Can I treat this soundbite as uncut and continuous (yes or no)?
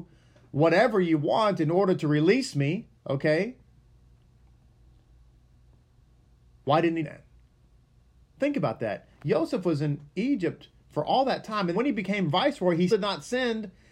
no